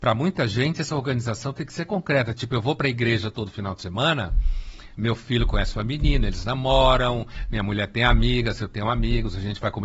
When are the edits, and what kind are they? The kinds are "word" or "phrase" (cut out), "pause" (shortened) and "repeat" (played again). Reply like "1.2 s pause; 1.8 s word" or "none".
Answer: none